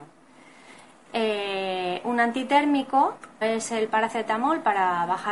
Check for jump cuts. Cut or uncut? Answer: cut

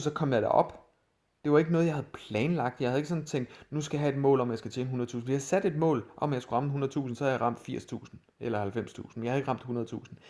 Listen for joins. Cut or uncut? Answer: uncut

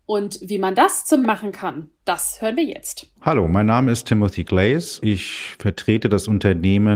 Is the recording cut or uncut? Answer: cut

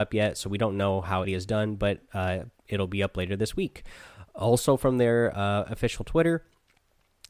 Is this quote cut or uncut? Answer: cut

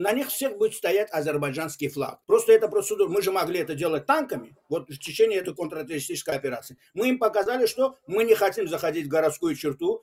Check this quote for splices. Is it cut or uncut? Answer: cut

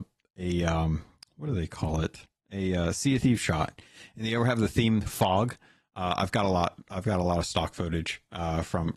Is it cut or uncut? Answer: uncut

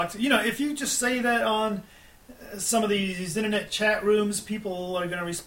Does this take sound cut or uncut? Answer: uncut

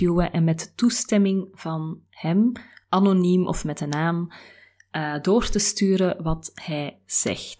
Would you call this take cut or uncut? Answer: uncut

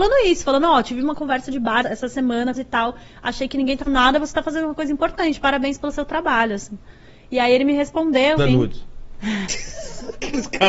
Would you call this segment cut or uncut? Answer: cut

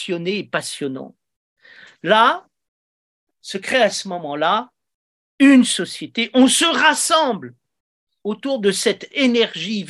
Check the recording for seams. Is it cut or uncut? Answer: uncut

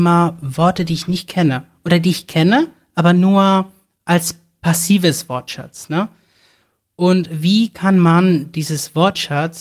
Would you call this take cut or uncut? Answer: uncut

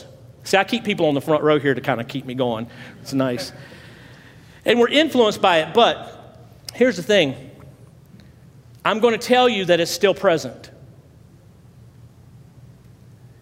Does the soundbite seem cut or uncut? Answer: uncut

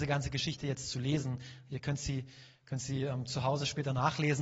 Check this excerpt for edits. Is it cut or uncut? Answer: uncut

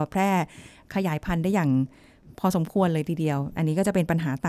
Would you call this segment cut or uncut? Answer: uncut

